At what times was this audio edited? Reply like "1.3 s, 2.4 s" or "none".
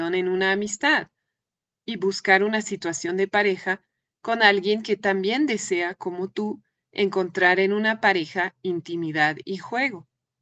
none